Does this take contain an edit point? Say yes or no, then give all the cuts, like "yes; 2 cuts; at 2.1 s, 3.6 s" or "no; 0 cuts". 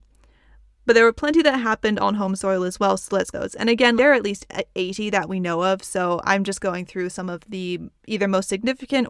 yes; 3 cuts; at 3.3 s, 4.0 s, 8.0 s